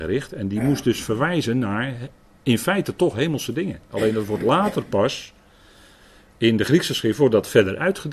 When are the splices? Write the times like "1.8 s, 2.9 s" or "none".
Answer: none